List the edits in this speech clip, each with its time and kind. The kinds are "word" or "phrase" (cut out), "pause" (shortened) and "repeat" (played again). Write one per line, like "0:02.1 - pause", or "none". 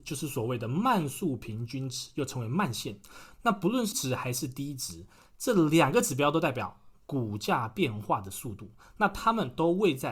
0:03.9 - word